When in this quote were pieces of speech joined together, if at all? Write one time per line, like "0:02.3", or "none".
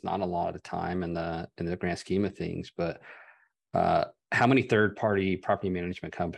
none